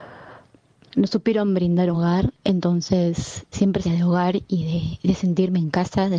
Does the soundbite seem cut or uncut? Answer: cut